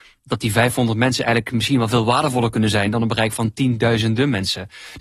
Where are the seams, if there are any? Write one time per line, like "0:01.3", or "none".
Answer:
none